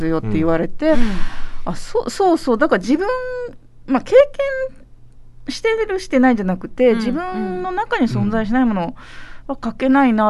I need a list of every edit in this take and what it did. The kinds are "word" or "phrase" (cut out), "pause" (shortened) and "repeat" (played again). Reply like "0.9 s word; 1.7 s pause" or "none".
none